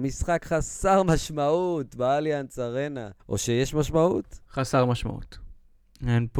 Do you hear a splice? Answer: yes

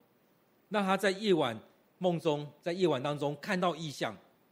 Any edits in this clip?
yes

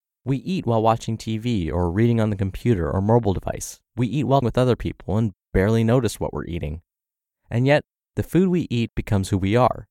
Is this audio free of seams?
no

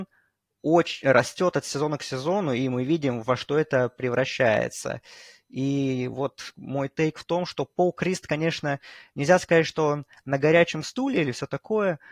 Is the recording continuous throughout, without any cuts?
yes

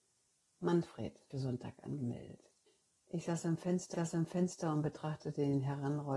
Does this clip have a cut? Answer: yes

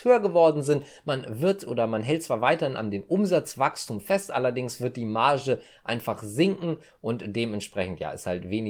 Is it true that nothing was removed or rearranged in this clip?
yes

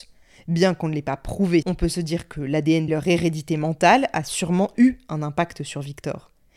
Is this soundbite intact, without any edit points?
no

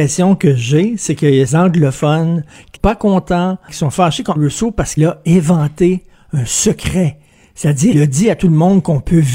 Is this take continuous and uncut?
no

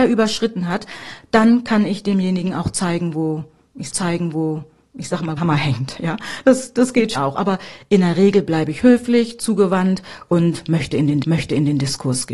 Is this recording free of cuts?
no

